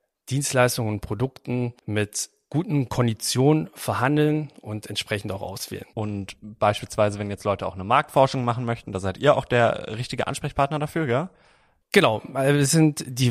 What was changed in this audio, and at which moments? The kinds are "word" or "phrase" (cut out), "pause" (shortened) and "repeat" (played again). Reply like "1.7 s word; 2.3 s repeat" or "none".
1.8 s pause

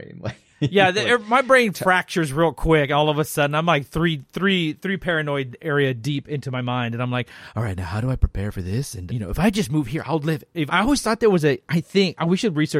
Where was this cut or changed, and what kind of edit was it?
9.1 s word; 10.7 s word

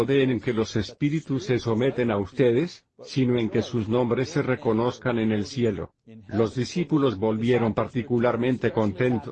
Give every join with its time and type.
none

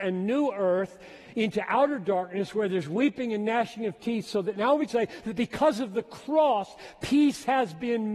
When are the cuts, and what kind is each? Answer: 4.9 s word

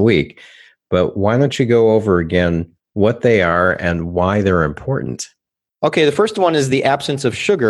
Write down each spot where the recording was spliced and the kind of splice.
none

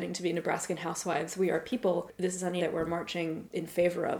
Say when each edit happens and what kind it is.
2.6 s word

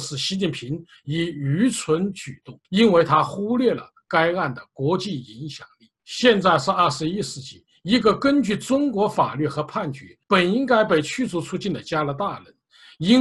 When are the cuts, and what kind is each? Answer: 2.6 s pause; 10.2 s pause

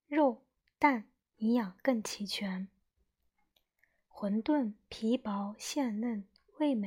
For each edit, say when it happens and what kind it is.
none

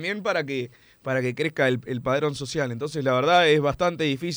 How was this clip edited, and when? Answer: none

